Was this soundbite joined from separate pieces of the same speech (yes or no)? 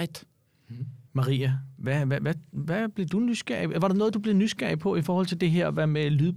yes